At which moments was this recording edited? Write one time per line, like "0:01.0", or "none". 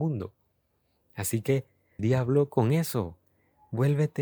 0:02.0